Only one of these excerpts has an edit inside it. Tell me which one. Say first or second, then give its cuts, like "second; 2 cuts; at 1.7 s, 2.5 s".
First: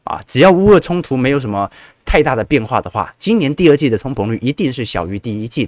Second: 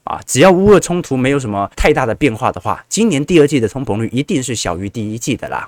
second; 1 cut; at 1.7 s